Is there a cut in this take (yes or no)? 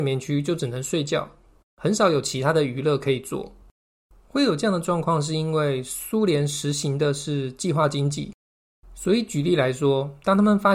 no